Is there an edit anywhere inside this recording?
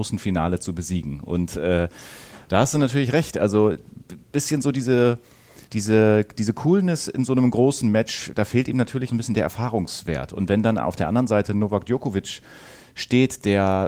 yes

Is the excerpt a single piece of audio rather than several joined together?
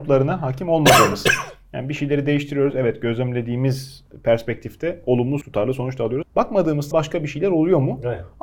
no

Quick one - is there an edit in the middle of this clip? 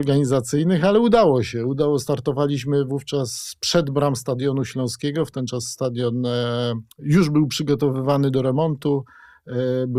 yes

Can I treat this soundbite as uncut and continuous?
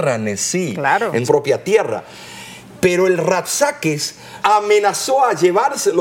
no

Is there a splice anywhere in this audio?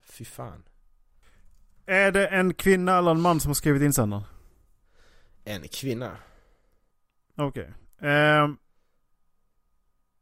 no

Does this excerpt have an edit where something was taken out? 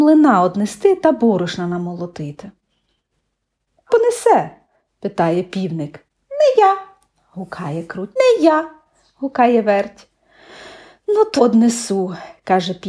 yes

